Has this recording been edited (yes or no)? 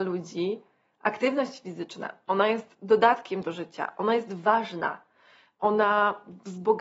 no